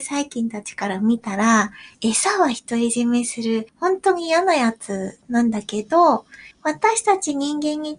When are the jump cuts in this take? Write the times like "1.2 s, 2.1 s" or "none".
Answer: 1.9 s, 3.7 s, 6.5 s